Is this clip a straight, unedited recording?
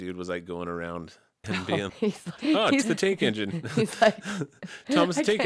no; 4 cuts; at 1.4 s, 1.9 s, 2.4 s, 2.8 s

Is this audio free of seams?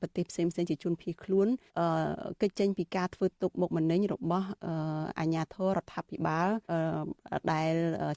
no; 2 cuts; at 1.7 s, 6.6 s

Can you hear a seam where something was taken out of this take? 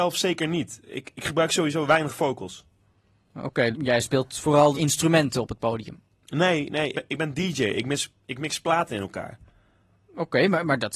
yes; 3 cuts; at 3.7 s, 4.7 s, 6.9 s

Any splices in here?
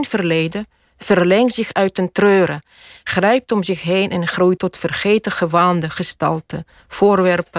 yes; 1 cut; at 4.6 s

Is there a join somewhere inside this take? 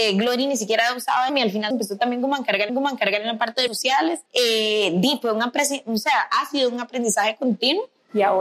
yes; 5 cuts; at 1.3 s, 1.7 s, 2.7 s, 3.7 s, 4.3 s

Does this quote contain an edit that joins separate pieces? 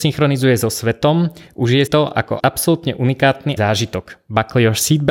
yes; 3 cuts; at 1.9 s, 2.4 s, 3.6 s

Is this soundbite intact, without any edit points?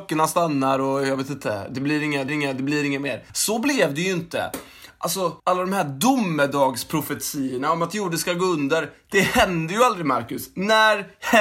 no; 3 cuts; at 2.3 s, 3.3 s, 5.4 s

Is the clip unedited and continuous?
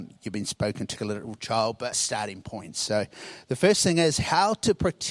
no; 2 cuts; at 1.0 s, 1.9 s

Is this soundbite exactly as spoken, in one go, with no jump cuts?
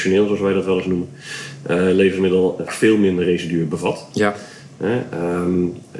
no; 1 cut; at 2.7 s

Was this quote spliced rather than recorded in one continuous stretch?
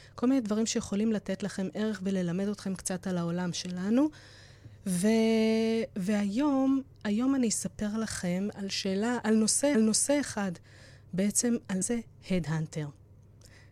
yes; 4 cuts; at 8.5 s, 9.2 s, 9.7 s, 11.8 s

